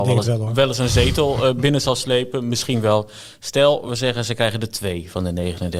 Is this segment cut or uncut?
uncut